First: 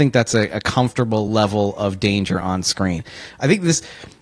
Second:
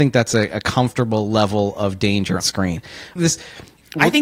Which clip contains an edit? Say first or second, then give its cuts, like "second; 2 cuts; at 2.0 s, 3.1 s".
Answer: second; 2 cuts; at 2.4 s, 3.2 s